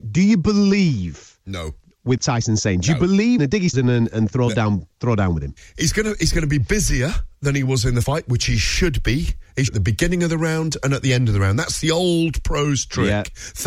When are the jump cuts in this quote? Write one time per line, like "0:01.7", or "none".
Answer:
0:02.2
0:03.4
0:03.7
0:04.9
0:08.0
0:09.7